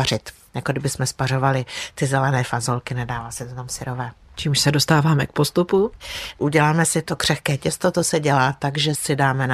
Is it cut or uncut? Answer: uncut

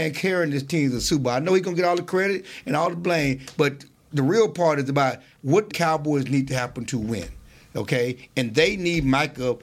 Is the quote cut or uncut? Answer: cut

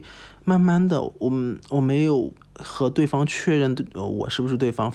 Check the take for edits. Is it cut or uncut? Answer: cut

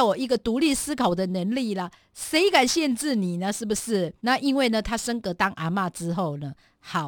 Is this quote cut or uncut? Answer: cut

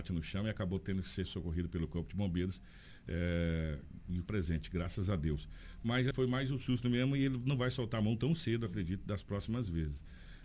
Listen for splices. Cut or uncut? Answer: cut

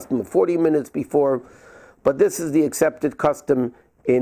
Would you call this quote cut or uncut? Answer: uncut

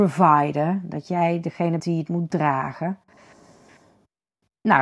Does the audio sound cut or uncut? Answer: cut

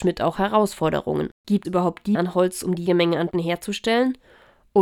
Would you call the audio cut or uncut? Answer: cut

